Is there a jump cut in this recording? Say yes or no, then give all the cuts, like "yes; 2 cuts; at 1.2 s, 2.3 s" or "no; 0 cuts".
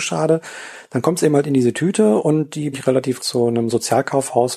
yes; 2 cuts; at 2.7 s, 3.2 s